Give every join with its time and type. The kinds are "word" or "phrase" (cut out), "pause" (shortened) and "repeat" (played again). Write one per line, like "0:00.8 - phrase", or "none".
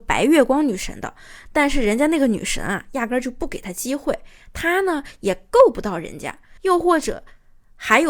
0:06.6 - pause